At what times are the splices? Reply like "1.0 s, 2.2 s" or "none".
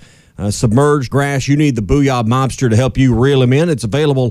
1.1 s